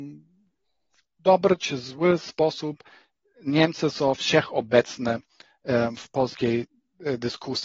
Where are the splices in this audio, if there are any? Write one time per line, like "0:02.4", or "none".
none